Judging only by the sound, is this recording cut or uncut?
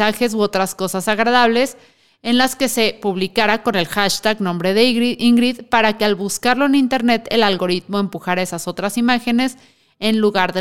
uncut